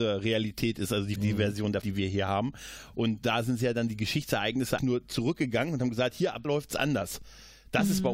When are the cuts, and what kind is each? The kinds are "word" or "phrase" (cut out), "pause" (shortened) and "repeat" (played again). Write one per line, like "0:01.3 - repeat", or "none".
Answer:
0:01.2 - word
0:01.8 - word
0:04.8 - word
0:06.4 - word